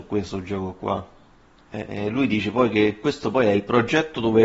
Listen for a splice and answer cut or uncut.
uncut